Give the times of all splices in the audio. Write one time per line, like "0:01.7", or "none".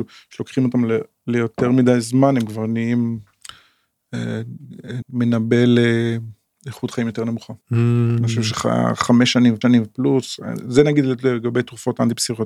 0:05.0
0:07.6
0:09.6